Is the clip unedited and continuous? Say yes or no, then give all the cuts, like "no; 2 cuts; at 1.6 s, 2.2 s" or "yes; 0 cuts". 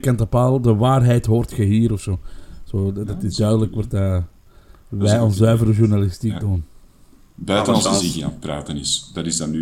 yes; 0 cuts